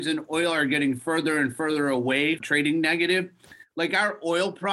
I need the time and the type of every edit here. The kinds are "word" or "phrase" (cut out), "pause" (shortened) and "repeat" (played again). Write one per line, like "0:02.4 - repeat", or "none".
0:02.4 - word